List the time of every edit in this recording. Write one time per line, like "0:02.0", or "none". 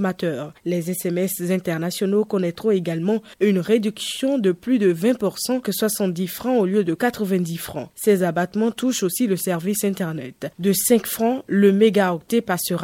0:05.6

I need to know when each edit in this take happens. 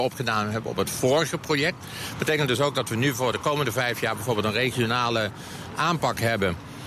none

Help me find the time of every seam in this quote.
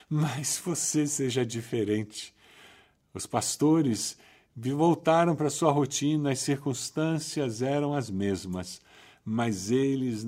none

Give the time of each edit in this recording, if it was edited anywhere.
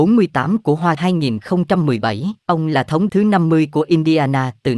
0:01.0
0:02.4
0:03.1

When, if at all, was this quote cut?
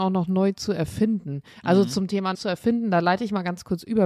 0:02.3

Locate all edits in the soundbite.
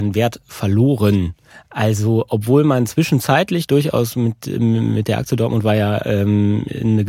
0:01.5

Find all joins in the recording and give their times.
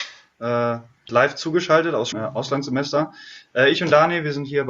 0:01.1
0:02.1

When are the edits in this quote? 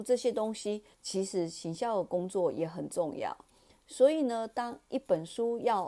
0:00.9

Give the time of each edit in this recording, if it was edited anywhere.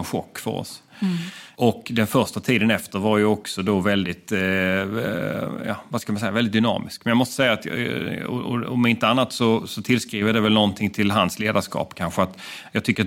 none

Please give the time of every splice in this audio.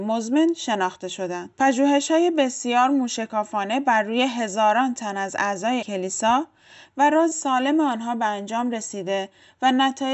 0:01.5
0:05.8
0:07.3

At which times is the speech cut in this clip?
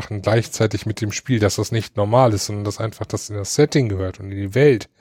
none

